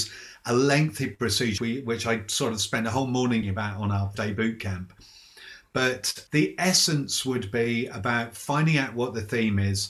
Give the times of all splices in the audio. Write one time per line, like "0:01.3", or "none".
0:01.6
0:03.4
0:04.1
0:06.3